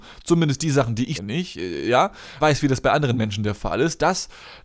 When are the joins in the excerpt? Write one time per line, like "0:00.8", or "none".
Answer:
0:01.2
0:02.4